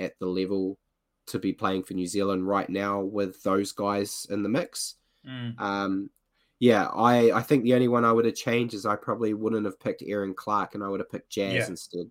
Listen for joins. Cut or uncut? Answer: uncut